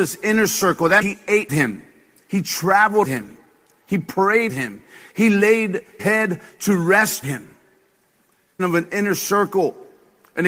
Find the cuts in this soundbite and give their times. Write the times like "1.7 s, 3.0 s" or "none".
1.0 s, 1.5 s, 3.0 s, 4.5 s, 6.0 s, 7.2 s, 8.6 s